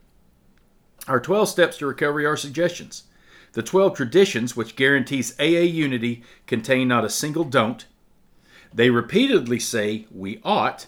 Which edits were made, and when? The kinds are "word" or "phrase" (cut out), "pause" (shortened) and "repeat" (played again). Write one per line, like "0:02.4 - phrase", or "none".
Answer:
none